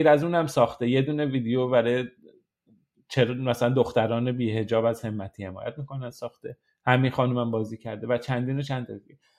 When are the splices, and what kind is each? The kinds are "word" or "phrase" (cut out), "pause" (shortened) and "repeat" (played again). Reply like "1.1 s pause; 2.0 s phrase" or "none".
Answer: none